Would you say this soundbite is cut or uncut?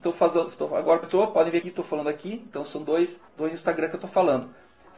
cut